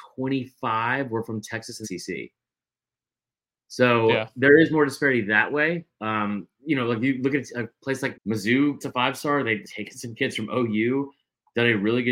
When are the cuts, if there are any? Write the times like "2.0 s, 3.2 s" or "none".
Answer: 1.8 s, 8.1 s, 8.8 s, 9.6 s